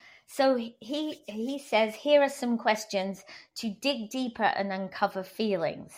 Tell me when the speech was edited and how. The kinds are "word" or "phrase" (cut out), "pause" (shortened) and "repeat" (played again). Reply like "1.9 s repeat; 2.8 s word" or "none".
none